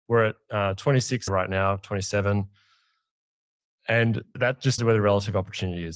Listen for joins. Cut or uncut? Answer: cut